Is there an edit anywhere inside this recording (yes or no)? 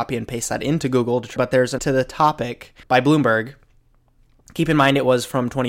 yes